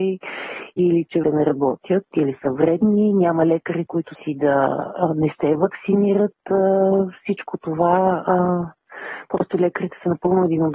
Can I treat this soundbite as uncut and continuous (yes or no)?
no